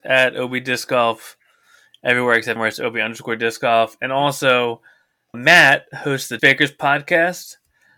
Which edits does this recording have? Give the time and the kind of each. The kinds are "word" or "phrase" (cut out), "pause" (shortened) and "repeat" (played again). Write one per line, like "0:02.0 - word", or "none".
0:02.6 - word
0:05.3 - word
0:06.4 - word